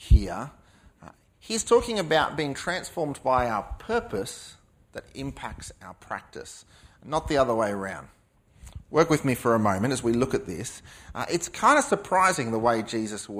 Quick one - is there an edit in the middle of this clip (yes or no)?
no